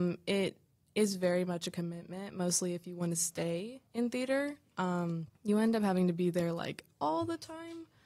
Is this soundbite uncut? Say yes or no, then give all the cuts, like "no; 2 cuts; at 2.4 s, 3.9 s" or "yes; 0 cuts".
no; 3 cuts; at 3.9 s, 5.3 s, 6.9 s